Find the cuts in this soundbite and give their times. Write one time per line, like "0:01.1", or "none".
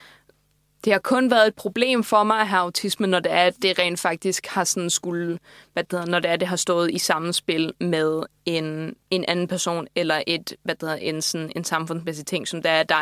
none